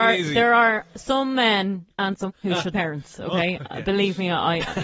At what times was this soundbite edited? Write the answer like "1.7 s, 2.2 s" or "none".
0.9 s, 1.9 s, 2.3 s, 2.7 s